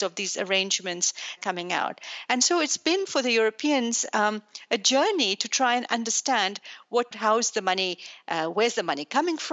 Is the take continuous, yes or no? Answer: no